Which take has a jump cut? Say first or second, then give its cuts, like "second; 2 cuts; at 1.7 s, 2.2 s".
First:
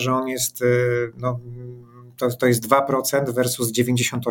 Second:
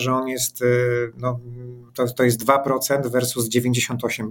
second; 1 cut; at 1.9 s